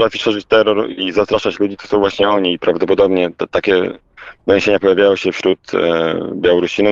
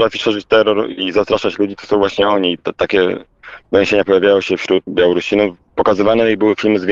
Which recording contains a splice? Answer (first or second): second